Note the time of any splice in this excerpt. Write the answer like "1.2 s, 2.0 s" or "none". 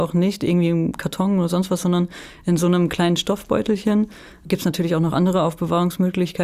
none